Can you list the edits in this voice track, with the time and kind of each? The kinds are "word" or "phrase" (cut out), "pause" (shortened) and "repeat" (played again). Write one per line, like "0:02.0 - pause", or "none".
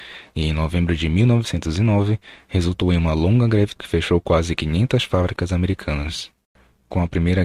0:03.8 - word